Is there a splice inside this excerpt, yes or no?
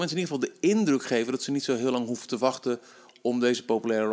no